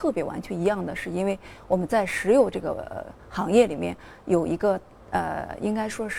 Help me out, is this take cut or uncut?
uncut